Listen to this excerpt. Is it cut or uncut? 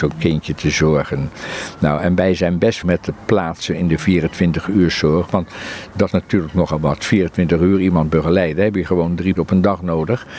cut